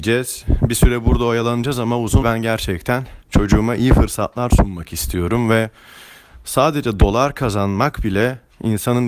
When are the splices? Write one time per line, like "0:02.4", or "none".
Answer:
0:02.2
0:03.2